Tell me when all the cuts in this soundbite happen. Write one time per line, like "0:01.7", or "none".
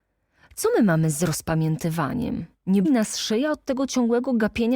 0:02.8